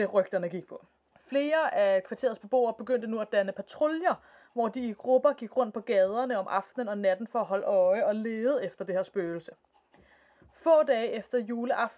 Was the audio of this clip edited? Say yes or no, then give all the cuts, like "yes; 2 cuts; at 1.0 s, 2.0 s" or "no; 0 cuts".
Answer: no; 0 cuts